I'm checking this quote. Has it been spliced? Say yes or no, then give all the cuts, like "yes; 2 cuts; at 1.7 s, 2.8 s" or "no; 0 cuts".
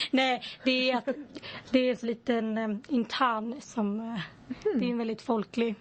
yes; 2 cuts; at 2.0 s, 3.6 s